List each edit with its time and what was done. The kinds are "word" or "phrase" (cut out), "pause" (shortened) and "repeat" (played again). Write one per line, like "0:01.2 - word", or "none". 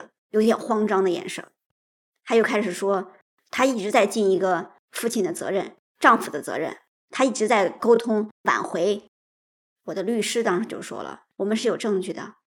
none